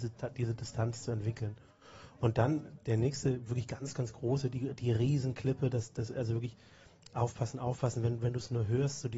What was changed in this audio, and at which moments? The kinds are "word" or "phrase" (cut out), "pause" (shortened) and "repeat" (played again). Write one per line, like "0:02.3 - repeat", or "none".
none